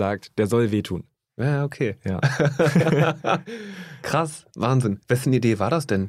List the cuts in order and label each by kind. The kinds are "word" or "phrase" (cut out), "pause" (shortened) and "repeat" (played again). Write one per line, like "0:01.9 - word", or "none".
0:01.3 - pause
0:05.0 - pause